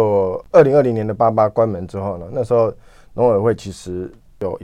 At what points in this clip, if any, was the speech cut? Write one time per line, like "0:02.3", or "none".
none